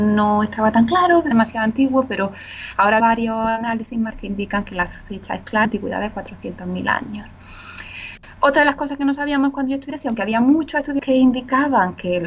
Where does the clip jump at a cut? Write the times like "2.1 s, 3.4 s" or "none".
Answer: 1.3 s, 3.0 s, 4.1 s, 5.6 s, 9.9 s, 11.0 s